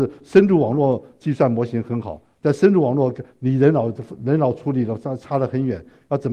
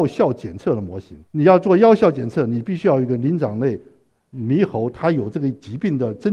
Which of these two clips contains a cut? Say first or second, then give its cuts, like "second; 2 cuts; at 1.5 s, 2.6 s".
second; 1 cut; at 1.3 s